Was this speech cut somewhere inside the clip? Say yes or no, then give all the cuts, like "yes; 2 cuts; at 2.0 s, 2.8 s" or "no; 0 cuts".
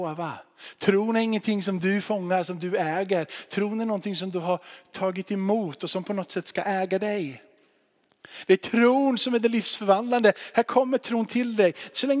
no; 0 cuts